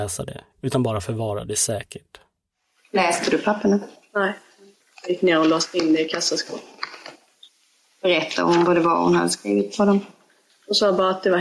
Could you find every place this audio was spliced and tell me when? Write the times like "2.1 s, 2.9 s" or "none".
none